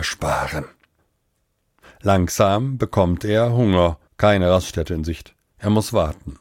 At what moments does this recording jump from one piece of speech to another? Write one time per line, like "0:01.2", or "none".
0:04.1